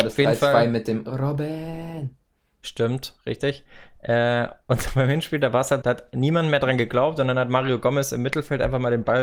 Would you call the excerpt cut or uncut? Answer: cut